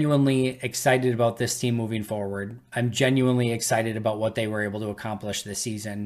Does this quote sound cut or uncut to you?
uncut